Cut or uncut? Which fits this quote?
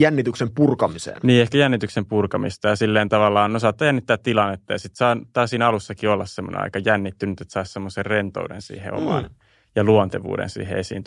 uncut